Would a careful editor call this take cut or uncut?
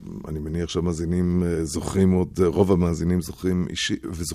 uncut